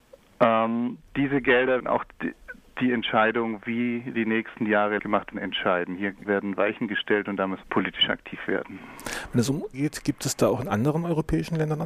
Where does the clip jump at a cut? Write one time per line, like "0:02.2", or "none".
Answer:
0:01.8
0:05.0
0:05.3
0:06.2
0:07.6
0:09.7